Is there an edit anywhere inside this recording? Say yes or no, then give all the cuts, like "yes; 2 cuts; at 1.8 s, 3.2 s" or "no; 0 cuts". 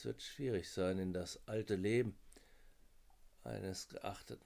yes; 1 cut; at 1.7 s